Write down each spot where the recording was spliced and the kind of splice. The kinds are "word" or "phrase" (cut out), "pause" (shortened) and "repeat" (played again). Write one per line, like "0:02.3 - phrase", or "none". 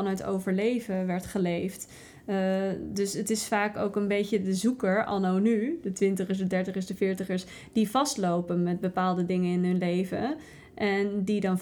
none